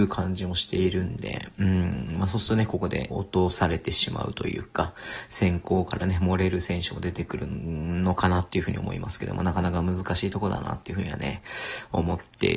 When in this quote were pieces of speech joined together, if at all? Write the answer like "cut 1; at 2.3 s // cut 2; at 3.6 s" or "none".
cut 1; at 3.1 s